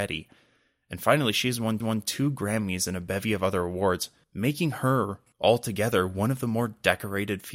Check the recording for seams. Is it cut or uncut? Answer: cut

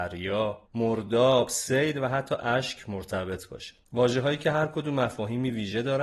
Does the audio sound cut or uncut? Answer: uncut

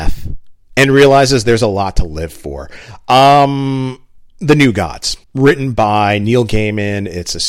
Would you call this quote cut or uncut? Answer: cut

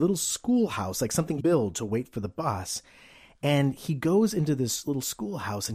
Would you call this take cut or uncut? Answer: cut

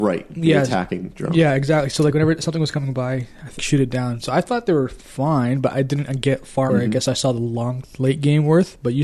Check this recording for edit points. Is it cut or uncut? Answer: cut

